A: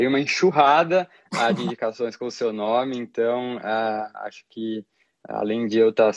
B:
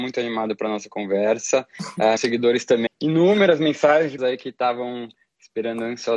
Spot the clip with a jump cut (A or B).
B